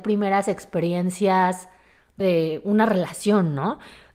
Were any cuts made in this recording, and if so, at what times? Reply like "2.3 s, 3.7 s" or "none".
2.2 s